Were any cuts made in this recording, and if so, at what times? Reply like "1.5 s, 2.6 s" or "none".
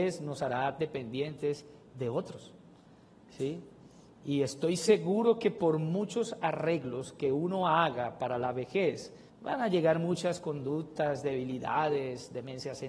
9.3 s